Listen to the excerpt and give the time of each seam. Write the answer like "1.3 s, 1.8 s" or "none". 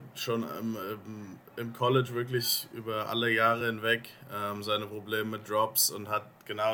none